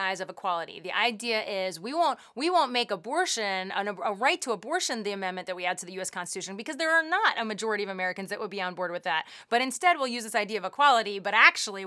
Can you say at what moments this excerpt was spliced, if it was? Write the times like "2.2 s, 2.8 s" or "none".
none